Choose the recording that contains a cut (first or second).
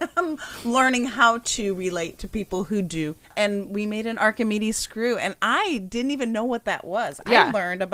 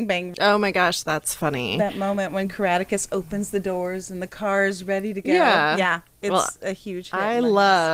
first